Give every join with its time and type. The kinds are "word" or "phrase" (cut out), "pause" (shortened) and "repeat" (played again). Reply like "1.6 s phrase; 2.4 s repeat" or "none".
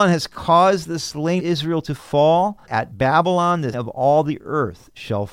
1.4 s word; 2.7 s word; 3.7 s word